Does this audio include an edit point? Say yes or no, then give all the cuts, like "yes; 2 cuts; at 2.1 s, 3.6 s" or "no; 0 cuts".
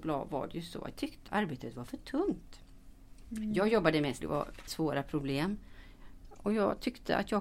yes; 4 cuts; at 0.9 s, 1.3 s, 4.2 s, 4.7 s